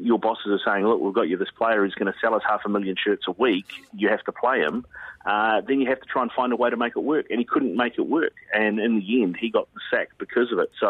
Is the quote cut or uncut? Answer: uncut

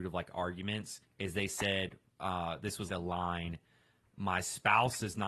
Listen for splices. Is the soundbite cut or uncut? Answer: cut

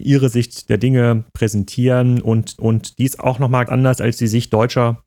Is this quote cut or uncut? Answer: cut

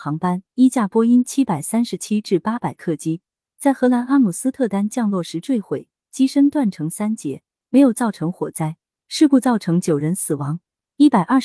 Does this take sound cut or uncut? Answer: uncut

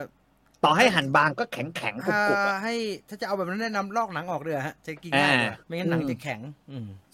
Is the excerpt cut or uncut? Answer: cut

